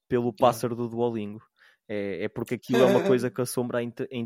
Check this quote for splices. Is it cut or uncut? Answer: uncut